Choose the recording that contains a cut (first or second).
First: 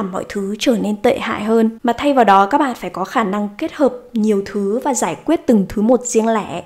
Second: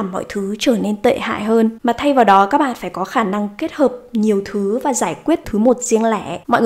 second